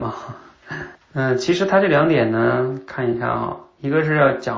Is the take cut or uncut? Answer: cut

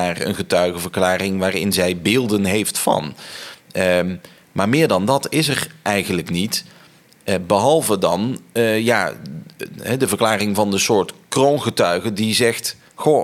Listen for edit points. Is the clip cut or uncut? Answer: uncut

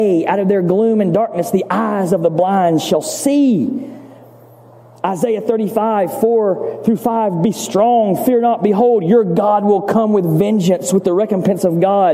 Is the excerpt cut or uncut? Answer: uncut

